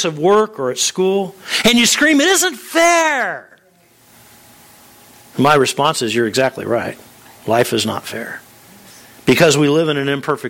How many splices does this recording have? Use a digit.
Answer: 0